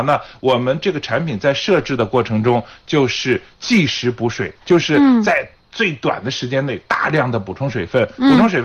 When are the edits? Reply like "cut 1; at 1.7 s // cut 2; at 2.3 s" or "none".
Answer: none